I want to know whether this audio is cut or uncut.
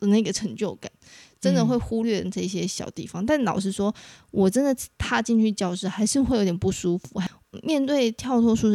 cut